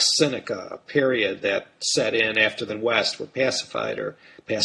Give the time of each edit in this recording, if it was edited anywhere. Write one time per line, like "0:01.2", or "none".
0:02.7